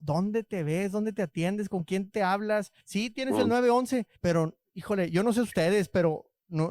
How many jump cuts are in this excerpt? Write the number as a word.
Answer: two